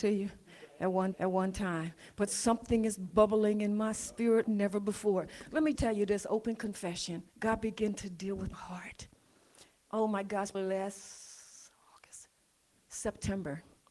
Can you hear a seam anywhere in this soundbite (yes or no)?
yes